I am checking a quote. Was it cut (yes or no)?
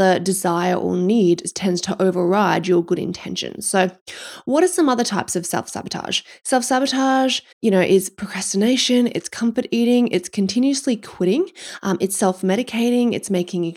yes